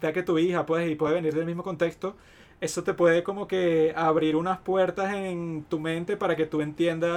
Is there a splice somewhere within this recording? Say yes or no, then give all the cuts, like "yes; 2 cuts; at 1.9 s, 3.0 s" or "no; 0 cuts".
no; 0 cuts